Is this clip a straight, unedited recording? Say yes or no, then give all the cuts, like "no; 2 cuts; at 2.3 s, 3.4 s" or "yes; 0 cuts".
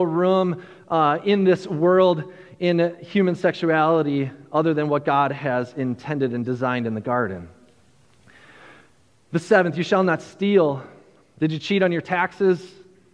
yes; 0 cuts